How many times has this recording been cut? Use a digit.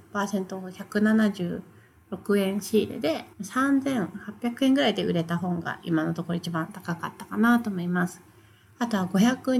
1